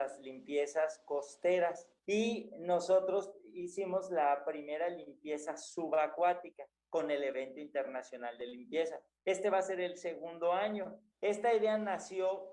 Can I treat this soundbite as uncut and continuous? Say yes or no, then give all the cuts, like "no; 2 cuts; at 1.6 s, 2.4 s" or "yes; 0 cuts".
no; 3 cuts; at 2.0 s, 9.1 s, 11.1 s